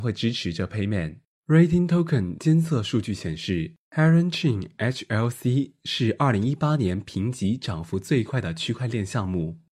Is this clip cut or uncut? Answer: uncut